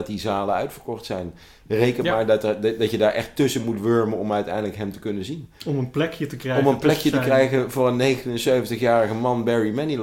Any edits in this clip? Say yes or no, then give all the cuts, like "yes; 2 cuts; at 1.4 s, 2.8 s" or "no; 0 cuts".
no; 0 cuts